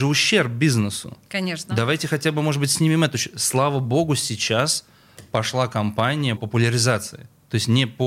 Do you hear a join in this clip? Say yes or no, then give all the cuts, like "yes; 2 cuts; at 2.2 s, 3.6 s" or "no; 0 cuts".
yes; 1 cut; at 6.4 s